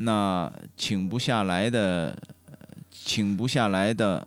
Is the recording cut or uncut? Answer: cut